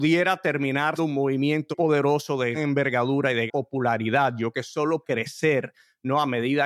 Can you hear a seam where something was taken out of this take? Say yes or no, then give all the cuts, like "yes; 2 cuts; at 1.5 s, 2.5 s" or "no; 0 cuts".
yes; 6 cuts; at 1.0 s, 1.7 s, 2.5 s, 3.5 s, 4.5 s, 5.0 s